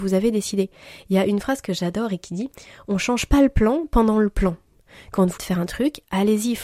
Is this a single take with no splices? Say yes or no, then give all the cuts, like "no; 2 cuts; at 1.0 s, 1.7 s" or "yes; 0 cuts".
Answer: no; 1 cut; at 5.4 s